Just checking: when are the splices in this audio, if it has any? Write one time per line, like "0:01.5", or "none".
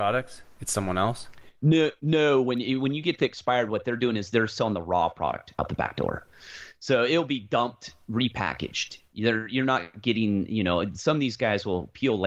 0:02.0